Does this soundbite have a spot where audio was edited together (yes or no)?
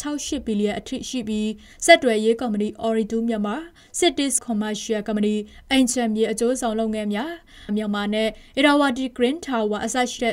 yes